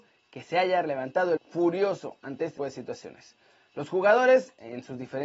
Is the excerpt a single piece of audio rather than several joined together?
no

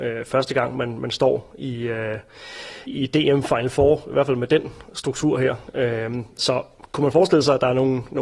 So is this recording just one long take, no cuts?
no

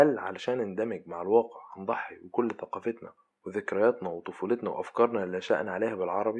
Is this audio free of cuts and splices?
yes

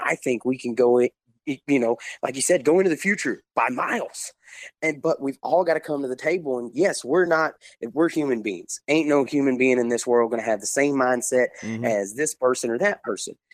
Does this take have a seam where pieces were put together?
no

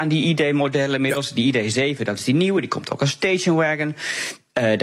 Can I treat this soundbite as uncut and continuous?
yes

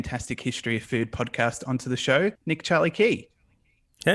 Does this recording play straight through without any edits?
no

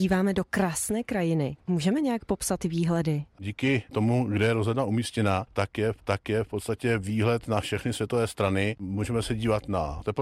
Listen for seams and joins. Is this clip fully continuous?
no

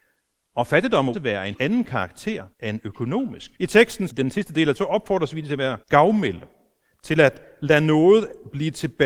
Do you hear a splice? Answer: yes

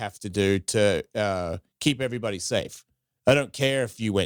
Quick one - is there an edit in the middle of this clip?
no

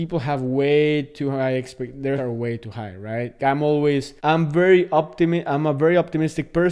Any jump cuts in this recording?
yes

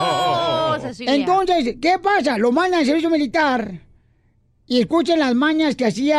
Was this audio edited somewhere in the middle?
no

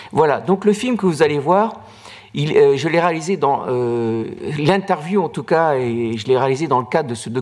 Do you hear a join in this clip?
no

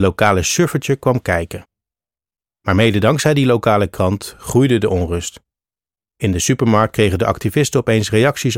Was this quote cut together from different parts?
no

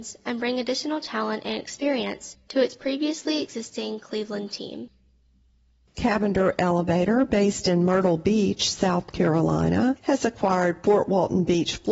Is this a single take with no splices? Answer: yes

